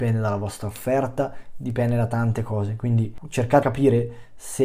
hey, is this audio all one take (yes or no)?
no